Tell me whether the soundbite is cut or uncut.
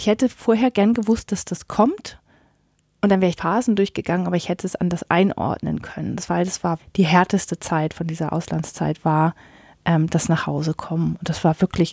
cut